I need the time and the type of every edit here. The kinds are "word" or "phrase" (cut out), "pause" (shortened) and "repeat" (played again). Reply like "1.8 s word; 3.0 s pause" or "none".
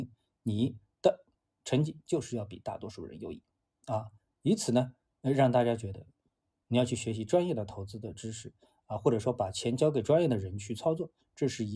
none